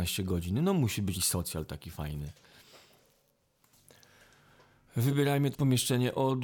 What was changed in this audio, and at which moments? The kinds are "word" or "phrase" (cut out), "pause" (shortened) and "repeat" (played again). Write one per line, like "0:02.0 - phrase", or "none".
0:01.1 - word
0:05.5 - word